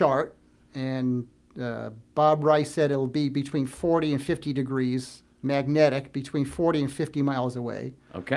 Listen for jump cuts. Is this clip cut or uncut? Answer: cut